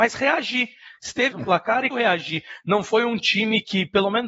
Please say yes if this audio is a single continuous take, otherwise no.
no